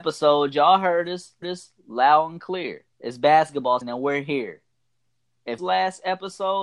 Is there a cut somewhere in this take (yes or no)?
yes